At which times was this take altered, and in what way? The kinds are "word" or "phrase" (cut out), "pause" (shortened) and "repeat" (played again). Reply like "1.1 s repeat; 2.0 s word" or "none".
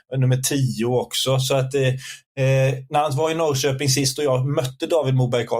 none